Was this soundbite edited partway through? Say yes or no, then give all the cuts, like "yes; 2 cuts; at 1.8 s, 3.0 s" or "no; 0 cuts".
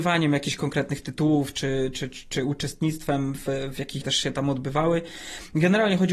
yes; 1 cut; at 4.0 s